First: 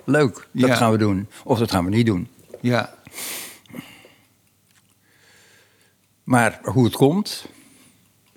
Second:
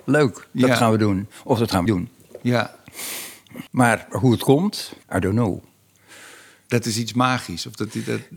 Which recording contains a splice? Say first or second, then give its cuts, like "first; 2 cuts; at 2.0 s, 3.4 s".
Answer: second; 3 cuts; at 1.9 s, 3.7 s, 5.0 s